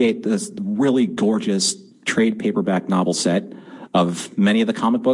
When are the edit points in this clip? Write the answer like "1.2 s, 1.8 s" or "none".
none